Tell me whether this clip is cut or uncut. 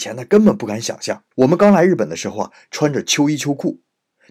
cut